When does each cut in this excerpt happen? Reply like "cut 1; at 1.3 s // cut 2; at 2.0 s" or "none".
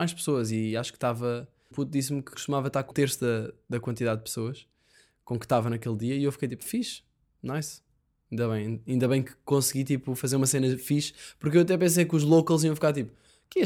cut 1; at 1.7 s // cut 2; at 2.3 s // cut 3; at 2.9 s // cut 4; at 6.6 s